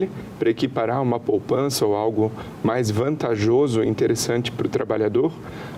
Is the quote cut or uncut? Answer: uncut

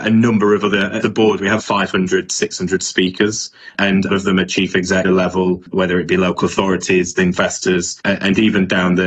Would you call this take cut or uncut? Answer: cut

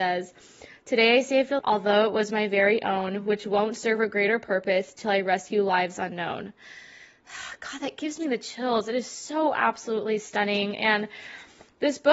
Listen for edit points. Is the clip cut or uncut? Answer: cut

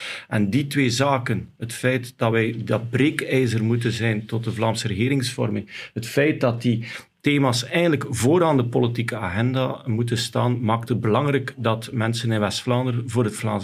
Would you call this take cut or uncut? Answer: uncut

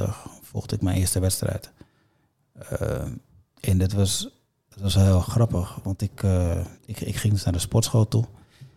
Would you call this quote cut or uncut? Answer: cut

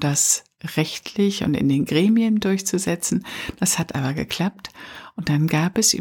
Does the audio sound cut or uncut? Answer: uncut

